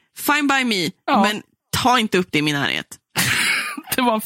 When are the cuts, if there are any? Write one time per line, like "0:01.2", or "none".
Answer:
none